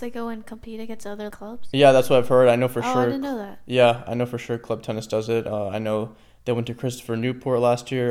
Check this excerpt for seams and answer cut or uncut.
cut